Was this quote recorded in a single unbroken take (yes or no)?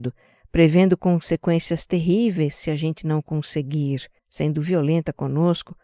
no